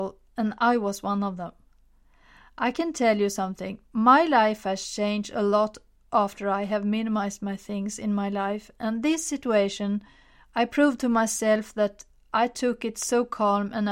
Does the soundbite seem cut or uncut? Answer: uncut